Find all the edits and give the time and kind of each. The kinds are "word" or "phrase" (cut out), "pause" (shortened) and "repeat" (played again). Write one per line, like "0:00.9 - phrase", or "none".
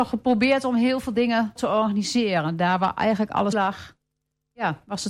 0:01.6 - word
0:03.5 - word